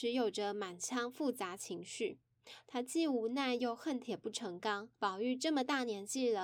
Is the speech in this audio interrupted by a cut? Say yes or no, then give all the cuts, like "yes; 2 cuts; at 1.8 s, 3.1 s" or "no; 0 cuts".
yes; 1 cut; at 4.9 s